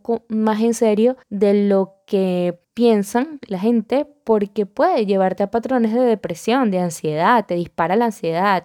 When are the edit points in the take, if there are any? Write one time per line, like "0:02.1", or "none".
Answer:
0:01.2
0:02.6